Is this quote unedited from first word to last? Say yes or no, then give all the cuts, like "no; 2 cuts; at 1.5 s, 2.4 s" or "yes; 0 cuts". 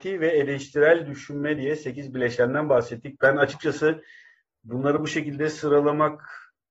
yes; 0 cuts